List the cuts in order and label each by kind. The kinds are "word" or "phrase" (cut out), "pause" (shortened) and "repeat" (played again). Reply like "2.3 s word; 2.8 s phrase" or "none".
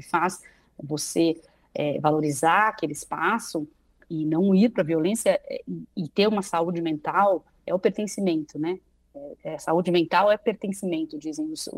none